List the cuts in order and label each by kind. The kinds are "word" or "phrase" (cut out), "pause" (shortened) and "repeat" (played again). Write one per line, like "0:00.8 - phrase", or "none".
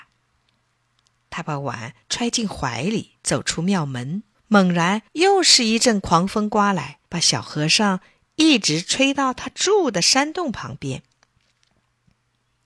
0:02.0 - pause
0:03.2 - pause
0:04.3 - pause
0:05.1 - pause
0:07.1 - pause